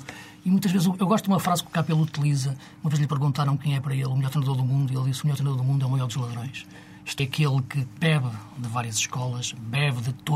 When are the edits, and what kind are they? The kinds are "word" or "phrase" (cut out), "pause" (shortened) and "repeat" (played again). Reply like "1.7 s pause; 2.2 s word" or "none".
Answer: 7.2 s word